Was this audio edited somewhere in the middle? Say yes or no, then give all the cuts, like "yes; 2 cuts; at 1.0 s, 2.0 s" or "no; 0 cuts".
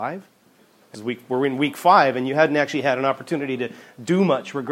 yes; 1 cut; at 0.9 s